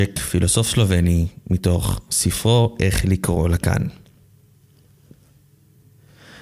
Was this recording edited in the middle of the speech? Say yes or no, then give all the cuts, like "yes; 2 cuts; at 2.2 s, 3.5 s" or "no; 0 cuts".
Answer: no; 0 cuts